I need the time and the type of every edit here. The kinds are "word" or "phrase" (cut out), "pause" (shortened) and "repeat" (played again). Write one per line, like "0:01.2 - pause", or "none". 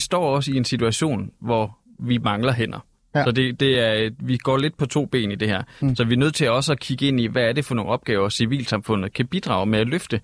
none

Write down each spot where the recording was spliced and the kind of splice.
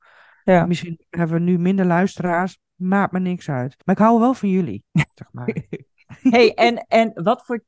0:03.8 - pause
0:04.9 - pause

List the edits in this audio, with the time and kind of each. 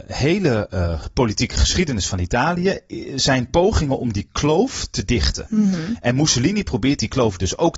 none

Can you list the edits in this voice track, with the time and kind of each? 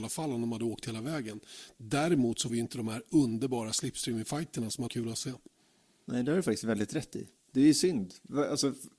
0:02.5 - word
0:04.9 - word

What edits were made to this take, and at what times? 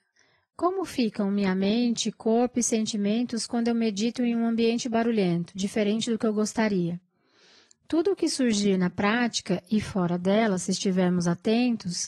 none

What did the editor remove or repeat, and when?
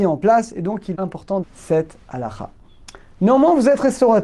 0:00.9 - word
0:01.4 - word

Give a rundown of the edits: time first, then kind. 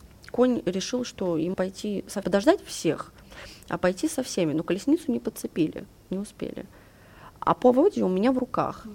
0:01.5 - word
0:02.2 - phrase

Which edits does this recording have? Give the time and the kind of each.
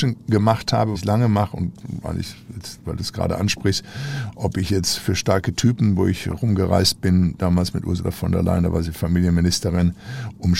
0:00.9 - word

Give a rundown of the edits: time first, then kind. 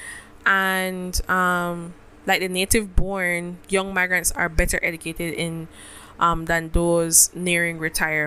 0:02.1 - pause

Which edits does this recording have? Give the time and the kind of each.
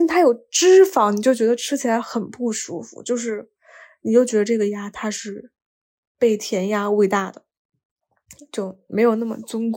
none

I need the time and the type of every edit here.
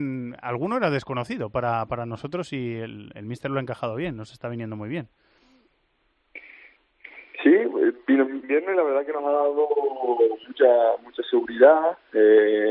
0:08.4 - phrase

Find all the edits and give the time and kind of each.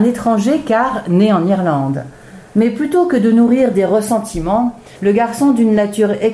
0:05.0 - pause

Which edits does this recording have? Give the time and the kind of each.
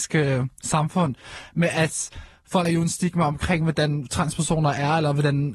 0:02.7 - word

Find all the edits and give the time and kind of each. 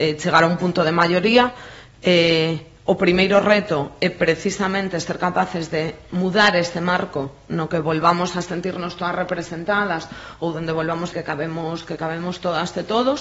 0:11.1 - phrase

